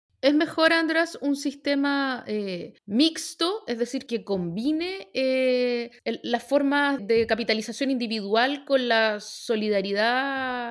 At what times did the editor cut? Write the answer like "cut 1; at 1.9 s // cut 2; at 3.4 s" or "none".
cut 1; at 2.8 s // cut 2; at 4.1 s // cut 3; at 6.0 s // cut 4; at 7.0 s